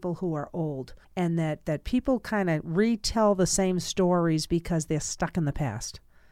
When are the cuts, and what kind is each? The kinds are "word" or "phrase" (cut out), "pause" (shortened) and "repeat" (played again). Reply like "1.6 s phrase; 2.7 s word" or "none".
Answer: 1.0 s pause